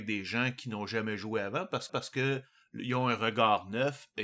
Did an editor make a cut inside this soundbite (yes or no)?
yes